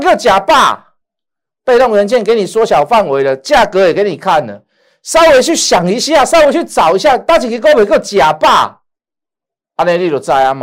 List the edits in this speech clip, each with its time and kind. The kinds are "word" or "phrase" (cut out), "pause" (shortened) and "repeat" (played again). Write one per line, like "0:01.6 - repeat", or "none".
none